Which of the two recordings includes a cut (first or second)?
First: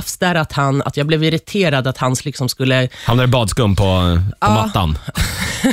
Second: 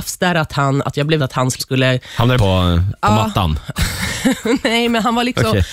second